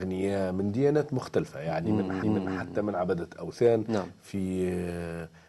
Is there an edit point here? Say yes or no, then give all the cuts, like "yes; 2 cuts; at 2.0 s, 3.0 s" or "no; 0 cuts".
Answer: yes; 1 cut; at 2.2 s